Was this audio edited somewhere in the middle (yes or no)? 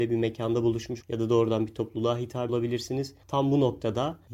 yes